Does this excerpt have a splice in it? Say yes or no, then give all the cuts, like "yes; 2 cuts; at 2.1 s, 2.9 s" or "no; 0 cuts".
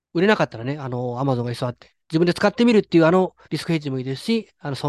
yes; 2 cuts; at 2.0 s, 3.4 s